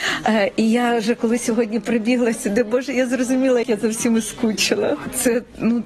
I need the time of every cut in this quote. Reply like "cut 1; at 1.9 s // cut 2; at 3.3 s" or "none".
cut 1; at 3.6 s